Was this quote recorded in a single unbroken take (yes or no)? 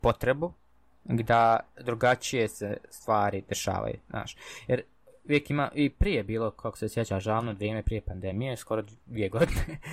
yes